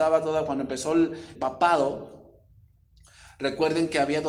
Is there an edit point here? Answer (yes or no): yes